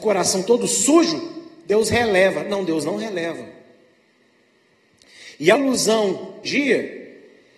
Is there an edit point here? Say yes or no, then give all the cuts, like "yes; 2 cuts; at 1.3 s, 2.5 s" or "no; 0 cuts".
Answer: yes; 2 cuts; at 5.6 s, 6.4 s